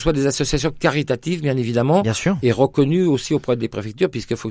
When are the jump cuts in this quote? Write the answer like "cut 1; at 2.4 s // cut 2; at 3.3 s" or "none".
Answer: none